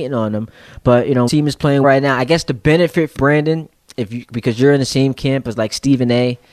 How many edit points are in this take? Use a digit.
3